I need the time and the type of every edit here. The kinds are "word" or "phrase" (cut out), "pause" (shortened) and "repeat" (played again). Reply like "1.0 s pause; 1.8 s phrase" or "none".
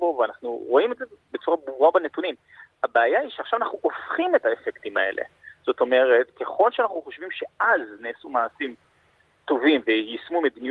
none